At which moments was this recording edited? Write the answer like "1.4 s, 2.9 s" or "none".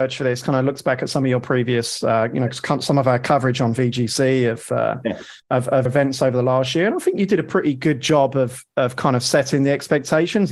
5.4 s, 5.8 s